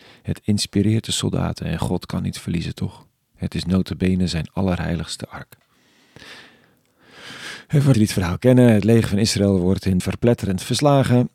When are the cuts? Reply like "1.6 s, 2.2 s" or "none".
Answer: 7.9 s, 10.0 s